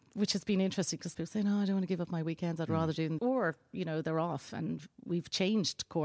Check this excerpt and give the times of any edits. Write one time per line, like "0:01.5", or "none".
0:01.1
0:03.2

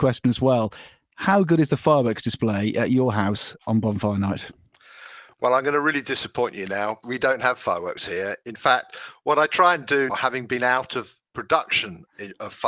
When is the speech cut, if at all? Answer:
0:07.0
0:10.1

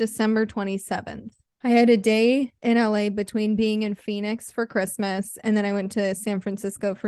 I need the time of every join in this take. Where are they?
0:01.5
0:02.6

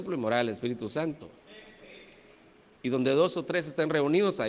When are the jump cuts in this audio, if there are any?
none

